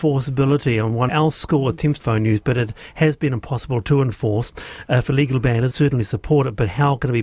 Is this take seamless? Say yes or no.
no